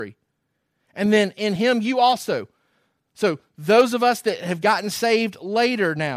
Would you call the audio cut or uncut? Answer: uncut